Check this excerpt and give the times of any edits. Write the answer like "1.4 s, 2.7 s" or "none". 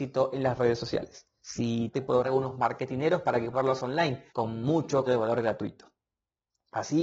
1.4 s, 1.9 s, 2.2 s, 3.5 s, 4.3 s, 5.1 s